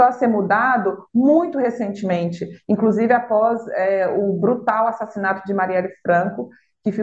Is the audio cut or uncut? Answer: uncut